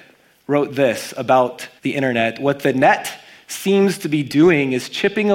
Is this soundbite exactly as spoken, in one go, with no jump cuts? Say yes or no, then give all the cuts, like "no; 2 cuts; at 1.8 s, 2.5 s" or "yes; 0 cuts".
no; 1 cut; at 1.8 s